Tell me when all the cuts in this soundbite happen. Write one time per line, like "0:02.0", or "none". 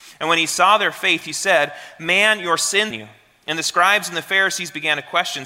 0:02.9